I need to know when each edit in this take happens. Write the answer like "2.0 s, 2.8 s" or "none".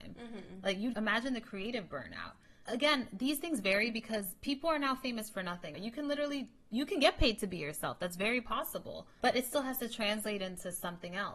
0.9 s, 2.7 s, 5.7 s, 9.2 s